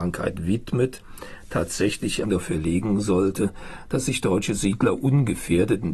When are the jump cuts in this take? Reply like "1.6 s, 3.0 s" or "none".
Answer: 2.2 s